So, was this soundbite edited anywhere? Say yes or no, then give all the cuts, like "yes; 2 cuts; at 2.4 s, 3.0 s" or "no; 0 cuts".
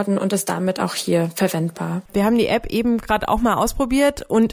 yes; 1 cut; at 2.1 s